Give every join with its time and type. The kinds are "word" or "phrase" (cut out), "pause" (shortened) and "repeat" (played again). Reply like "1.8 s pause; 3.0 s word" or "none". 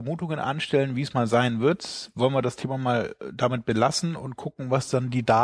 none